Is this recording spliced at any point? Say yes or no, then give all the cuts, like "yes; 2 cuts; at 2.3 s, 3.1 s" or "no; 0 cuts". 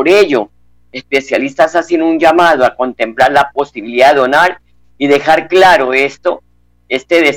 no; 0 cuts